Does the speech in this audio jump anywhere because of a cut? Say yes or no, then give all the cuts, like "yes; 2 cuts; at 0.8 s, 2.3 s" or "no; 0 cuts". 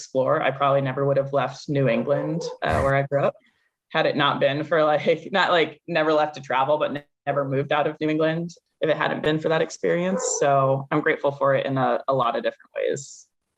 no; 0 cuts